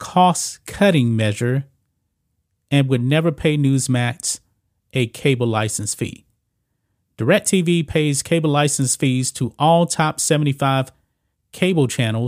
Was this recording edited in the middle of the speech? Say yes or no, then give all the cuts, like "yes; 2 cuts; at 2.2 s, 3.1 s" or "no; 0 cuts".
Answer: no; 0 cuts